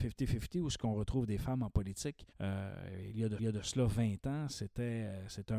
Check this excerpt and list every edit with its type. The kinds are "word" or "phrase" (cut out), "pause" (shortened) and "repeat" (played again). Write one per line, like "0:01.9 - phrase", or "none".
0:02.3 - pause
0:03.4 - repeat